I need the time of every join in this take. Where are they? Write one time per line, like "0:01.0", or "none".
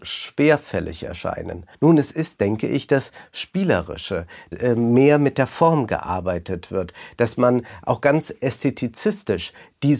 0:01.7
0:04.5